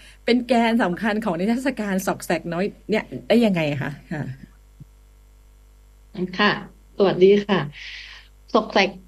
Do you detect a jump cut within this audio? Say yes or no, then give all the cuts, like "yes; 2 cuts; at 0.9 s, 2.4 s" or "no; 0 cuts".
no; 0 cuts